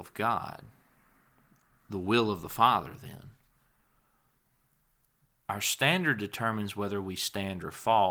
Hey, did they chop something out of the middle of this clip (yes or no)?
no